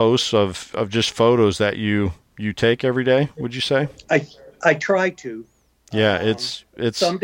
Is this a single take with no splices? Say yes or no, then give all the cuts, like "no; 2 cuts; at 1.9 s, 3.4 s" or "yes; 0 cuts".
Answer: yes; 0 cuts